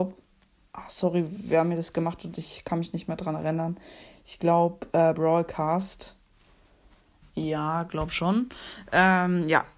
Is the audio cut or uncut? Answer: uncut